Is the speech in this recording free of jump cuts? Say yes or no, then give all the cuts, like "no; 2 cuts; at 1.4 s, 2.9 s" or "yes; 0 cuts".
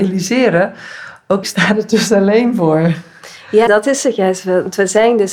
no; 2 cuts; at 1.4 s, 3.7 s